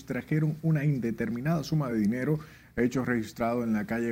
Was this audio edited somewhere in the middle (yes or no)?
no